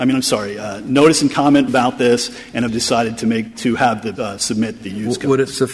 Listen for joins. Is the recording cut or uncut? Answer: cut